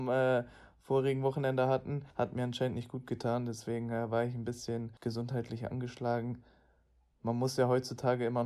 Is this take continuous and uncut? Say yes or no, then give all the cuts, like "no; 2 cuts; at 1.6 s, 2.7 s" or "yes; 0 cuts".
no; 2 cuts; at 2.1 s, 5.0 s